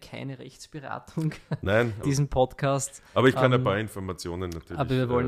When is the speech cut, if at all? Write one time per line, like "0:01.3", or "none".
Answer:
0:02.0